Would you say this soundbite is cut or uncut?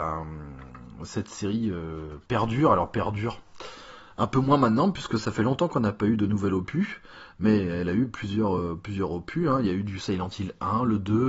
uncut